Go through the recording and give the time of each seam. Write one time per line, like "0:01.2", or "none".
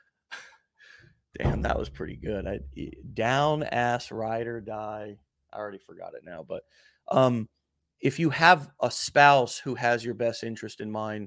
none